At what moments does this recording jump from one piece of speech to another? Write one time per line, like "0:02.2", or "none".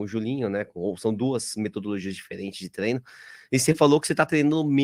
none